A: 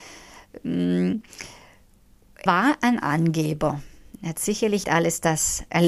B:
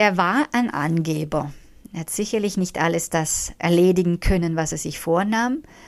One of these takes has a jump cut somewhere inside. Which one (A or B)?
A